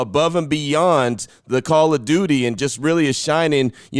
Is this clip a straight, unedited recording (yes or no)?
yes